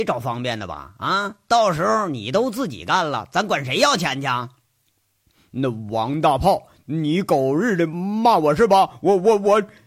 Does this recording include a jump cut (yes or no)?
no